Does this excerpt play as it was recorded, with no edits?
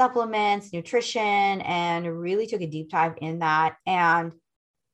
no; 1 cut; at 3.8 s

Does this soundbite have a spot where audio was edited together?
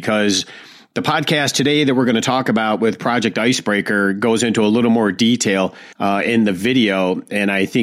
yes; 1 cut; at 5.9 s

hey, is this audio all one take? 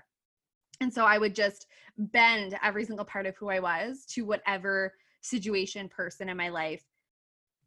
yes; 0 cuts

